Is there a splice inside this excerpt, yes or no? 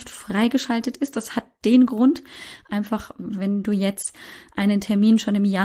no